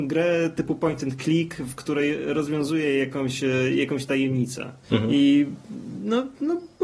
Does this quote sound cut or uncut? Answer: cut